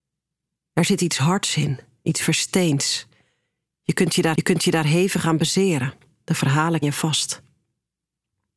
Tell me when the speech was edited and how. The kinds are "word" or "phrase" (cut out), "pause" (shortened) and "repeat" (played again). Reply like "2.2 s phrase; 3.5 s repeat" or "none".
4.3 s repeat; 6.8 s word